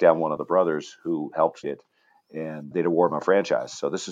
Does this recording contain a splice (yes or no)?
yes